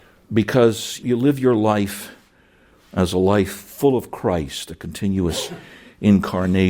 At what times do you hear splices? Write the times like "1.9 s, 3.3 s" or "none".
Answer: 1.0 s